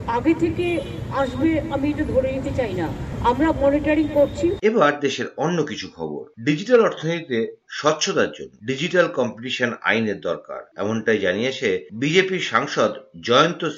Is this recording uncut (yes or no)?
yes